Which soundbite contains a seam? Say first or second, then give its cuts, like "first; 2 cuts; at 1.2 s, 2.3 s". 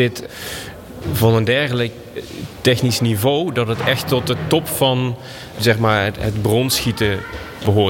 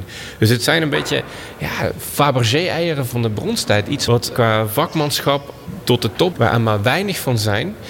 second; 1 cut; at 6.3 s